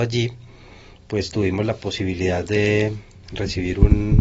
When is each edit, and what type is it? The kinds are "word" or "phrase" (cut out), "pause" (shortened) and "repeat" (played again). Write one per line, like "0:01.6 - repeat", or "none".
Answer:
none